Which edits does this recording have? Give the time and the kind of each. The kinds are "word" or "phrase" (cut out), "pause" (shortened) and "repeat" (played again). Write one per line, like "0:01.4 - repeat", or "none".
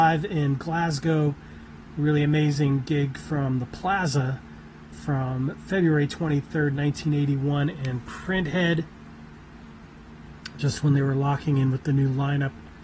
none